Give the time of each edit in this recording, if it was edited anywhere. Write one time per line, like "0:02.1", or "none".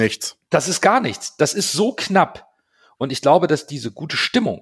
none